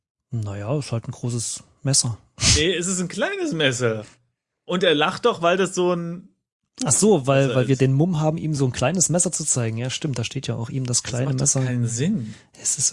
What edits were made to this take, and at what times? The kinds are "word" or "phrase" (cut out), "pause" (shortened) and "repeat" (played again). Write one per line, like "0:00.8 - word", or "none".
none